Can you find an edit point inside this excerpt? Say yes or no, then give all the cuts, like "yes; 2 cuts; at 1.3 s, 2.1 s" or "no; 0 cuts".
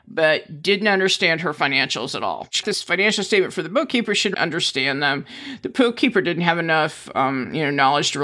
yes; 2 cuts; at 2.6 s, 4.3 s